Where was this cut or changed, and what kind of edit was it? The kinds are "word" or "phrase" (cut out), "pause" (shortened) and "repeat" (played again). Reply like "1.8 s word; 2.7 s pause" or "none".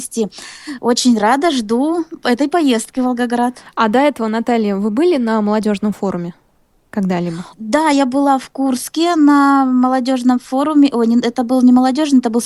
7.5 s pause